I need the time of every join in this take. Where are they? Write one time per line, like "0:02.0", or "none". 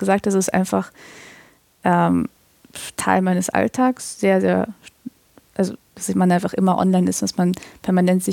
none